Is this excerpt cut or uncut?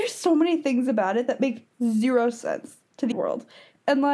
cut